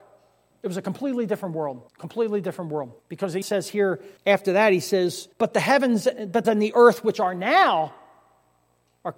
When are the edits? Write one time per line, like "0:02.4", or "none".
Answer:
0:01.9
0:03.0
0:03.4
0:04.2
0:05.3
0:06.4